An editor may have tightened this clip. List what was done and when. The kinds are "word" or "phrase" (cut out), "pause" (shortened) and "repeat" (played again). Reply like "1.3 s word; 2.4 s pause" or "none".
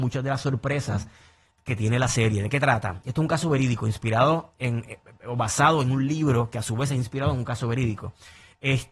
none